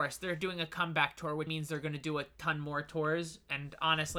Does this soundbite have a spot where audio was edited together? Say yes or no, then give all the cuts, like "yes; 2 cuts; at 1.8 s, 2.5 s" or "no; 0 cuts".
yes; 1 cut; at 1.5 s